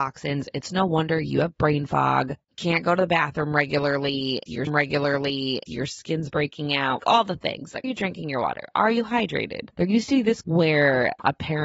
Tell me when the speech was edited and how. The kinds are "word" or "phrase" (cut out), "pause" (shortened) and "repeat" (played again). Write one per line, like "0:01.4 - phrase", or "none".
0:02.4 - pause
0:04.7 - repeat
0:07.0 - word
0:07.8 - word
0:09.7 - pause
0:10.4 - word